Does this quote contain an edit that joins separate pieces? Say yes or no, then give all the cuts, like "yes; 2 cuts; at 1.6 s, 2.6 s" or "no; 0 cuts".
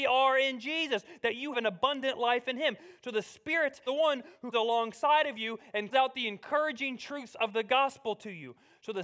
yes; 4 cuts; at 1.5 s, 3.9 s, 4.5 s, 5.9 s